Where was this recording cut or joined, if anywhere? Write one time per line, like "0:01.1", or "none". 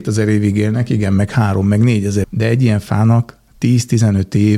0:02.2